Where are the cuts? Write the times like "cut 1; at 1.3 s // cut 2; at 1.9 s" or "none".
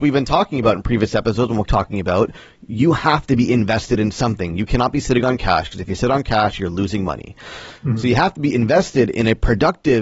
cut 1; at 1.7 s

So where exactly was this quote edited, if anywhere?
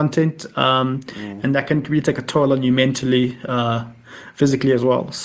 none

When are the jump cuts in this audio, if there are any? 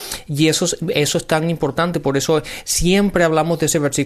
none

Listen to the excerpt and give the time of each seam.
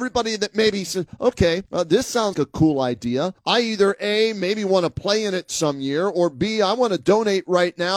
cut 1; at 1.7 s // cut 2; at 2.3 s // cut 3; at 3.4 s

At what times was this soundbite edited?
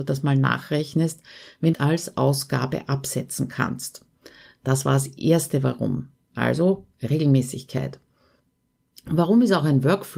cut 1; at 1.7 s

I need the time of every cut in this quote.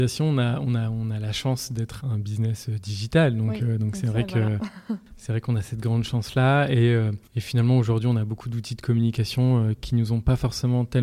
cut 1; at 2.0 s // cut 2; at 7.3 s

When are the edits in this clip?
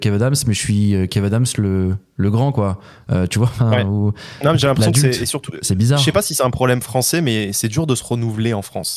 none

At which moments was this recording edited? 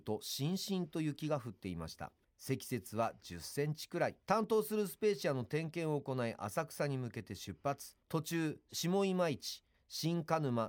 cut 1; at 2.2 s // cut 2; at 4.2 s // cut 3; at 8.0 s // cut 4; at 9.7 s

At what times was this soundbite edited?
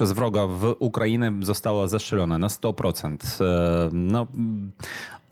none

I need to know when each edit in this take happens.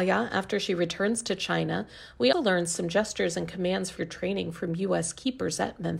cut 1; at 2.3 s // cut 2; at 4.0 s

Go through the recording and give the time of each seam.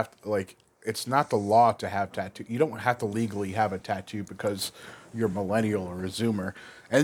none

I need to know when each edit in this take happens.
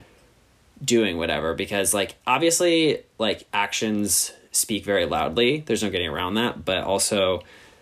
cut 1; at 3.5 s

